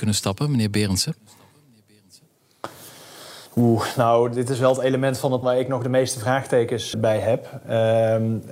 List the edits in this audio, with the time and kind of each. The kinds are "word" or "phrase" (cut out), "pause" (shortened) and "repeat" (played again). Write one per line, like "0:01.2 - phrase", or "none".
0:03.5 - pause
0:05.4 - word
0:06.9 - word